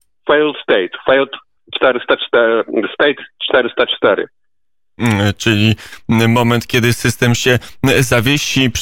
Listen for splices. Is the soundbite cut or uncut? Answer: cut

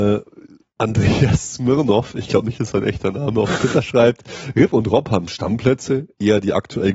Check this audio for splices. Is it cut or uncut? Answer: uncut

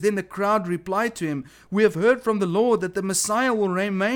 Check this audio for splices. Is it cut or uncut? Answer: uncut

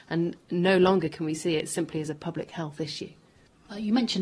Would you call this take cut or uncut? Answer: uncut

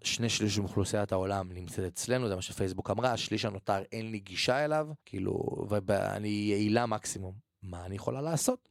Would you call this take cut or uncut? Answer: cut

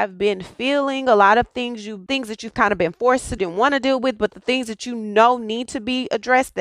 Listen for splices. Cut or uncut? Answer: cut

